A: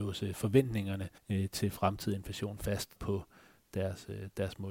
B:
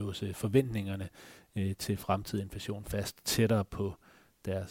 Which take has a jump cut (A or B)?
A